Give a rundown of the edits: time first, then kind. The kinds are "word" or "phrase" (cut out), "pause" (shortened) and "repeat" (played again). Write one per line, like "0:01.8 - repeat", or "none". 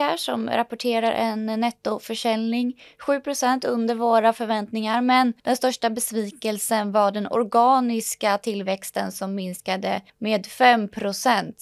0:05.4 - pause
0:10.1 - pause